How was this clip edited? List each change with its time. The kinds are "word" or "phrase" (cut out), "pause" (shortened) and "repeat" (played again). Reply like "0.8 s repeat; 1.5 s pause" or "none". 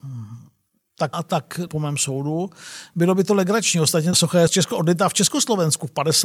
1.1 s word; 1.7 s word; 4.1 s phrase; 4.5 s word